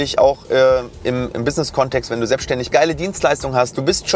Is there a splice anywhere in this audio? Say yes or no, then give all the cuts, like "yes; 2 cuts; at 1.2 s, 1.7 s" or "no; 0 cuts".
yes; 2 cuts; at 1.3 s, 2.7 s